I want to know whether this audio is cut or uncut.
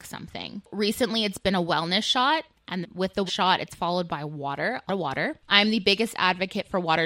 cut